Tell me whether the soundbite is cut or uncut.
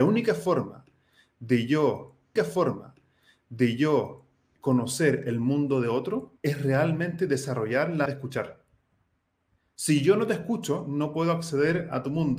cut